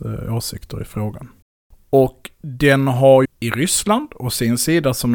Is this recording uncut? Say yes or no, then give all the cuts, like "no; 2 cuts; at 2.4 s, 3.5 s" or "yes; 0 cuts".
no; 2 cuts; at 1.4 s, 3.2 s